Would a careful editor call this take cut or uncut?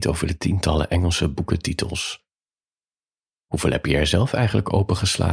uncut